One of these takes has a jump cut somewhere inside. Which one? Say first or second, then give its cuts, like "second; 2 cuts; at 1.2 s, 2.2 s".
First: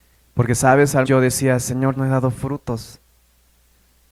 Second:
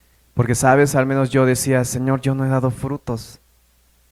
first; 2 cuts; at 1.0 s, 2.0 s